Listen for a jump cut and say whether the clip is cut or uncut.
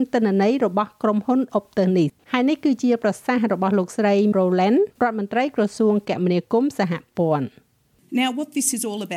cut